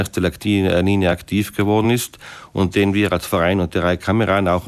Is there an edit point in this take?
no; 0 cuts

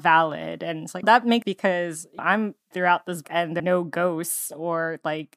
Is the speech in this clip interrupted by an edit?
yes; 6 cuts; at 1.0 s, 1.4 s, 2.2 s, 2.7 s, 3.2 s, 3.6 s

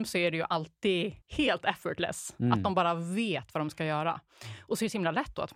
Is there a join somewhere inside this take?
yes; 1 cut; at 1.2 s

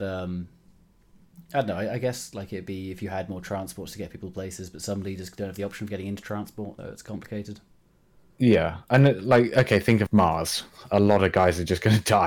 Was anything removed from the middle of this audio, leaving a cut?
yes; 2 cuts; at 6.8 s, 10.1 s

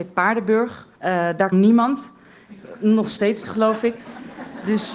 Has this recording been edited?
yes; 3 cuts; at 0.9 s, 1.5 s, 3.4 s

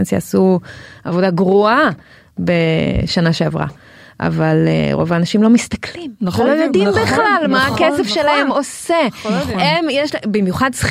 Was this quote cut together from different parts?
no; 0 cuts

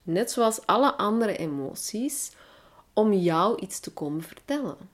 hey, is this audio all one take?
yes; 0 cuts

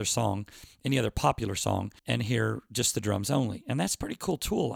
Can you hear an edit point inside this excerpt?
yes; 1 cut; at 2.0 s

